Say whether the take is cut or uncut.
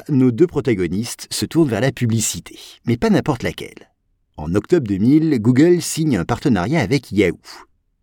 uncut